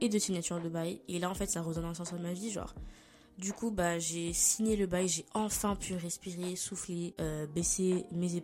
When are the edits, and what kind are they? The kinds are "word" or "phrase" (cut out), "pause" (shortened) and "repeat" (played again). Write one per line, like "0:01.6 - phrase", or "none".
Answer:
none